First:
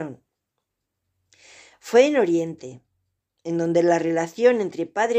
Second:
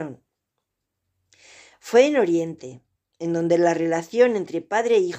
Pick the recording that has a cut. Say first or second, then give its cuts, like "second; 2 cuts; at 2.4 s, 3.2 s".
second; 1 cut; at 3.0 s